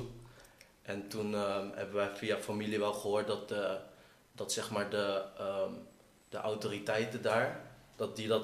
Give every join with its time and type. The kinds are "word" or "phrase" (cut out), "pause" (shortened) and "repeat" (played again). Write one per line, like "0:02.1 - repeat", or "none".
none

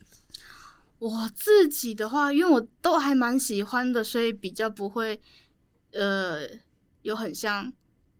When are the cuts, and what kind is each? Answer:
none

